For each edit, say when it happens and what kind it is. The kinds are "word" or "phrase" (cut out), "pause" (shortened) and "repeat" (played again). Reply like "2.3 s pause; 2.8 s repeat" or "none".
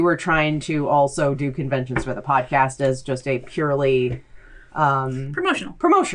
none

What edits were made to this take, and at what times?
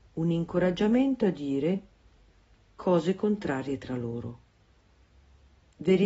none

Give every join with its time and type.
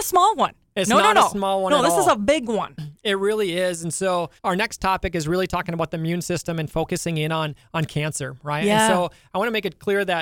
4.4 s pause

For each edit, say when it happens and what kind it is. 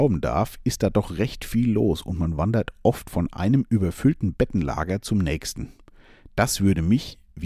none

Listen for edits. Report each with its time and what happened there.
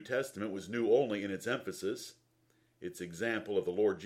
none

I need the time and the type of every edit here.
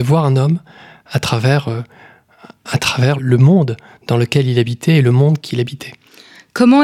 3.2 s word

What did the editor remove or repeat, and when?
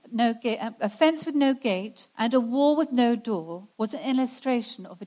2.1 s pause; 3.7 s pause

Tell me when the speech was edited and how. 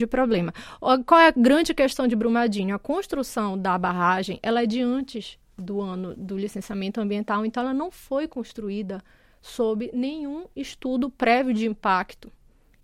none

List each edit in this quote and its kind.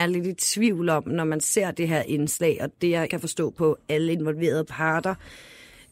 3.1 s phrase

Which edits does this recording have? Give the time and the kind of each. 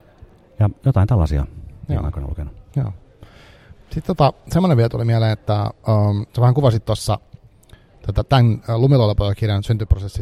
6.3 s pause

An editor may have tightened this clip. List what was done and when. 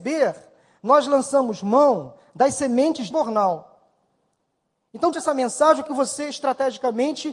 3.1 s word; 5.1 s word; 5.9 s word

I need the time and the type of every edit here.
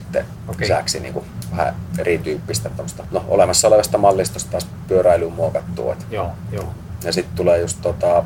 none

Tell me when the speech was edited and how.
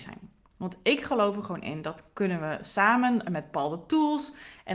none

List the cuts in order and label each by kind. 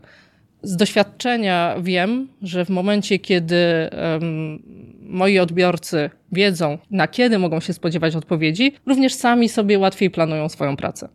6.8 s pause; 8.8 s pause

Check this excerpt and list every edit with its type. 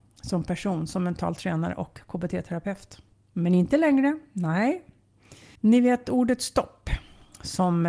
3.1 s pause; 5.5 s pause

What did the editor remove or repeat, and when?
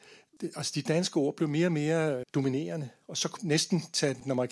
2.2 s word; 3.4 s word

